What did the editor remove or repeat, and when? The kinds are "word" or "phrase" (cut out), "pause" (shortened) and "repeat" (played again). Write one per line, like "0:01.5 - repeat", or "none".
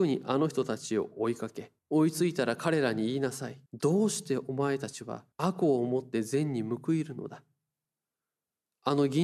0:01.8 - pause
0:03.7 - pause
0:05.3 - pause